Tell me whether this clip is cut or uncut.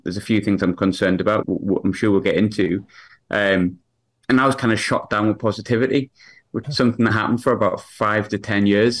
cut